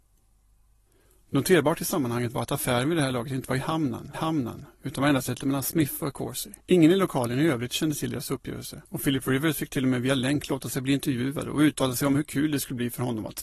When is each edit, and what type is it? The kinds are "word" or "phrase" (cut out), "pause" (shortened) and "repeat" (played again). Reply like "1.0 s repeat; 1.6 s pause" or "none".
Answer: 4.1 s repeat; 5.4 s word; 6.6 s pause; 8.8 s pause